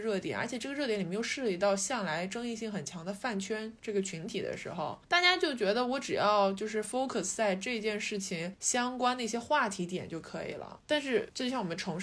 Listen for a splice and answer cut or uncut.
uncut